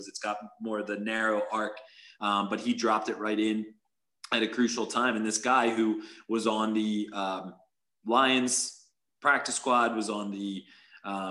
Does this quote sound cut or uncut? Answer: uncut